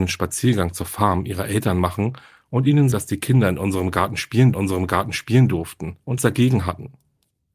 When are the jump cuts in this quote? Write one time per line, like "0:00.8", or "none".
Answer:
0:02.9
0:04.5
0:06.2